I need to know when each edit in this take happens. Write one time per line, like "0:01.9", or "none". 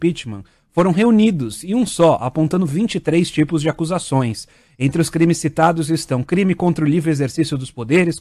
none